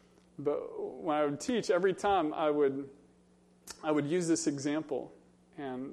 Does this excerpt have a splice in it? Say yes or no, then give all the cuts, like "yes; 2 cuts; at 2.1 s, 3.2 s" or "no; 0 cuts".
no; 0 cuts